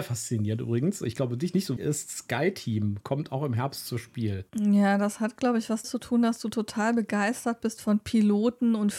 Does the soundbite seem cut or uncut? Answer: cut